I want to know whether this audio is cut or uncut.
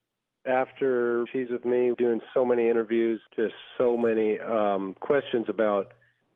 cut